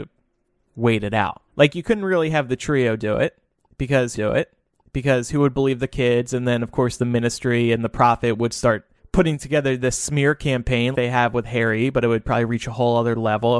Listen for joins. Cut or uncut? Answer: cut